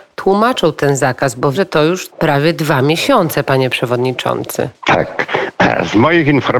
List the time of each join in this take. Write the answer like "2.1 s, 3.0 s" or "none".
1.5 s, 2.1 s